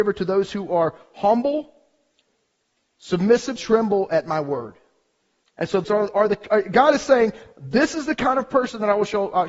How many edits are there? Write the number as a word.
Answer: two